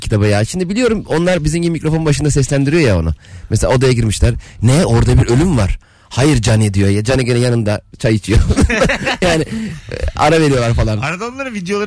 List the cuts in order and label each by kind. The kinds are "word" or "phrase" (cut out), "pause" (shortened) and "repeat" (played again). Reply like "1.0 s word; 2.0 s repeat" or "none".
none